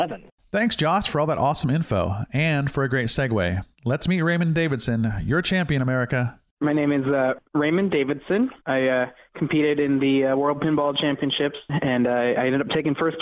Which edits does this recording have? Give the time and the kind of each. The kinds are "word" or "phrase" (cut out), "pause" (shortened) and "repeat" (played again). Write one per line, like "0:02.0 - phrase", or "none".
0:03.7 - pause
0:07.4 - pause
0:08.6 - pause